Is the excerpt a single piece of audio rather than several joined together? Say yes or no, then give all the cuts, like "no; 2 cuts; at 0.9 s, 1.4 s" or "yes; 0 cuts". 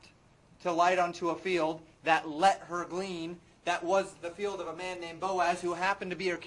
yes; 0 cuts